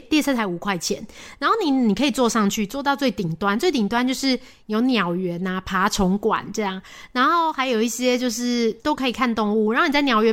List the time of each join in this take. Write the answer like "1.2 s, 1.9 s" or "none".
8.8 s